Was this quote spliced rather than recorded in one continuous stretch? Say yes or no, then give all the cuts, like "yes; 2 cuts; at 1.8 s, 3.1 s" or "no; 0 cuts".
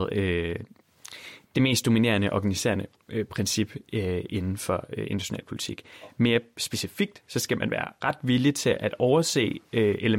yes; 1 cut; at 1.4 s